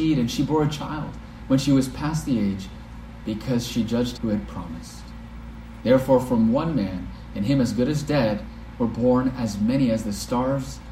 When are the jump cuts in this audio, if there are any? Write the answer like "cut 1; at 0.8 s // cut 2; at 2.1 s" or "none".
cut 1; at 4.2 s